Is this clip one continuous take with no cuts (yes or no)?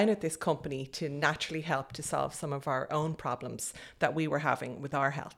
yes